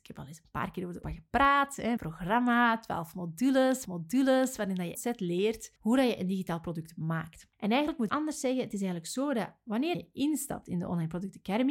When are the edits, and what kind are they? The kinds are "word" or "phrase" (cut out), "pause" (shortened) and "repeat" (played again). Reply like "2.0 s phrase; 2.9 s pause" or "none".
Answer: 1.0 s word; 2.0 s word; 3.8 s repeat; 4.9 s phrase; 5.8 s pause; 7.5 s pause; 8.1 s phrase; 9.9 s word